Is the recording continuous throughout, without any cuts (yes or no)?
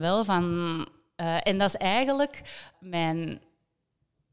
no